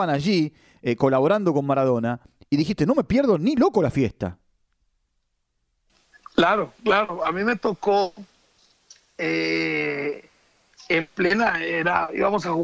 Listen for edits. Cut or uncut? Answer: uncut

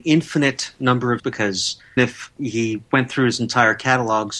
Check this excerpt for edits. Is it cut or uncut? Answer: cut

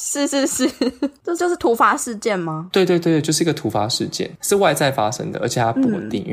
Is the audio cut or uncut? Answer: cut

